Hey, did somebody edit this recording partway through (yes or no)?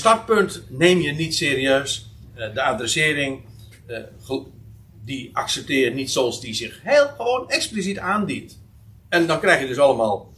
yes